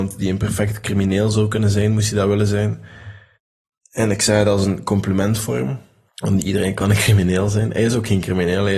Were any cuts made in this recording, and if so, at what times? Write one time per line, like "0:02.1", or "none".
0:03.3
0:06.1